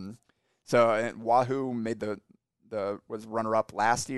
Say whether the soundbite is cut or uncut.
uncut